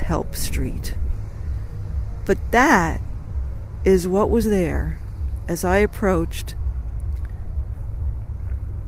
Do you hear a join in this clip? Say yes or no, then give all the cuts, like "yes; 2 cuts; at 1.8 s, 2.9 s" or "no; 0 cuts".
no; 0 cuts